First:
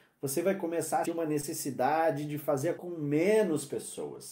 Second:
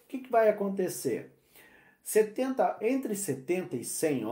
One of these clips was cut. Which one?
first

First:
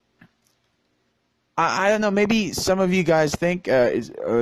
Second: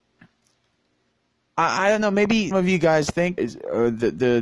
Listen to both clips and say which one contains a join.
second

